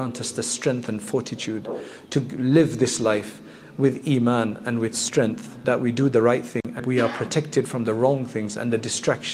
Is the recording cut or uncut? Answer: cut